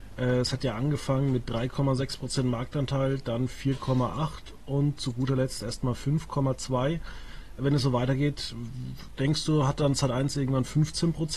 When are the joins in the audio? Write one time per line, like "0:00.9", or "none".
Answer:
none